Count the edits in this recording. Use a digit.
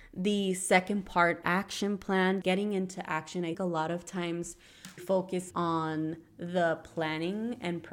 5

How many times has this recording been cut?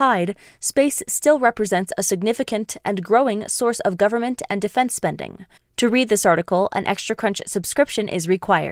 1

